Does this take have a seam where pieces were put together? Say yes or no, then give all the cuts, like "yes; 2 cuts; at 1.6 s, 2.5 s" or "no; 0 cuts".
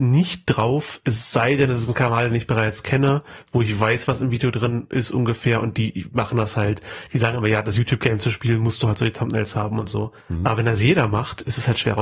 yes; 1 cut; at 10.2 s